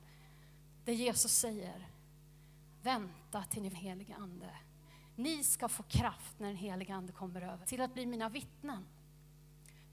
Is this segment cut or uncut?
cut